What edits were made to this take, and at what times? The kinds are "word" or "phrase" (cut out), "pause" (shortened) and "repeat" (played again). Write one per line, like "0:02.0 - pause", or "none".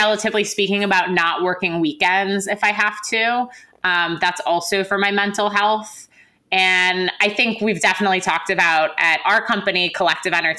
none